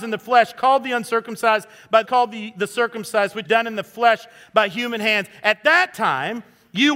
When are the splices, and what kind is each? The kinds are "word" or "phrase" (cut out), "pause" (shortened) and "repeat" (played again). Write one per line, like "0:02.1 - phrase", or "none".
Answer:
0:02.0 - word
0:03.4 - word